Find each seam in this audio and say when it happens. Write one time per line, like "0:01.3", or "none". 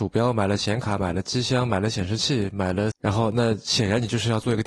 0:02.9